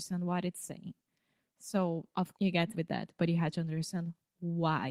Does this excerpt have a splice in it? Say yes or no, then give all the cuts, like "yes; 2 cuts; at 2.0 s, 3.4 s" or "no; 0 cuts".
yes; 2 cuts; at 2.3 s, 2.7 s